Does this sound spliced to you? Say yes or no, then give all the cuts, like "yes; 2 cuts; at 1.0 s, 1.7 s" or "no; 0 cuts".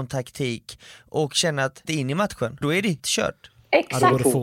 yes; 3 cuts; at 1.8 s, 2.6 s, 3.0 s